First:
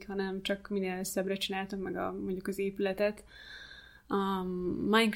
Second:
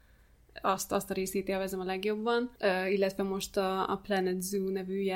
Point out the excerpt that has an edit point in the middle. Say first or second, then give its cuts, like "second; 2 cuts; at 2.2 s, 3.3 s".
second; 1 cut; at 2.6 s